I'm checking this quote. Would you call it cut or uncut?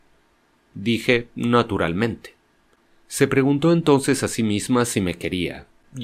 uncut